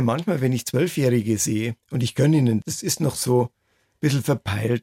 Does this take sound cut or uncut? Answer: cut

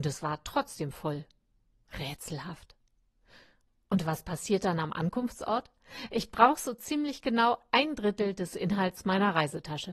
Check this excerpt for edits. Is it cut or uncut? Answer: uncut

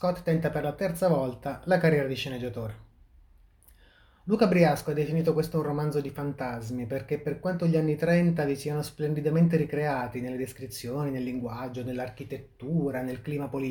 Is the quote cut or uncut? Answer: uncut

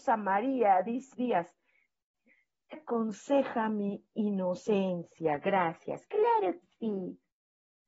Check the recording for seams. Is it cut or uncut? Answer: cut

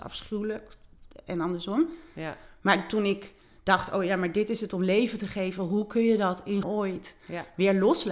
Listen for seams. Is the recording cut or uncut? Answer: cut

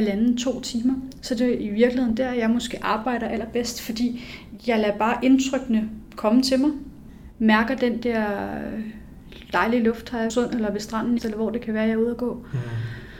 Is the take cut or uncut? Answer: cut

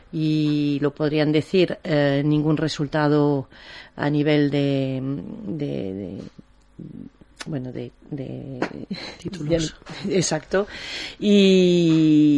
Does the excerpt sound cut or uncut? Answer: uncut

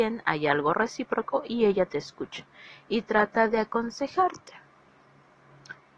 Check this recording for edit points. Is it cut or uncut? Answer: uncut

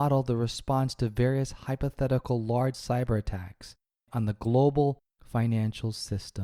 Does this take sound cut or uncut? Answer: cut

